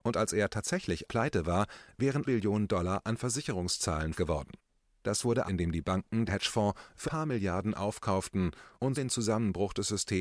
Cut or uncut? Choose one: cut